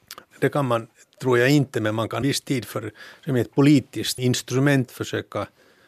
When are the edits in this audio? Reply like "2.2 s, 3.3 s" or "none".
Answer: 2.2 s, 4.2 s, 4.9 s